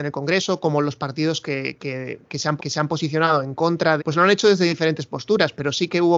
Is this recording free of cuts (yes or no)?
no